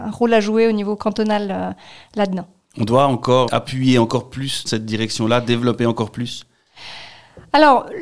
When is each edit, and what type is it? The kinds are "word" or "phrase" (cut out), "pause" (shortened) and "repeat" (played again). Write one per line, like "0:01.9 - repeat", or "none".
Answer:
0:03.5 - word
0:04.7 - word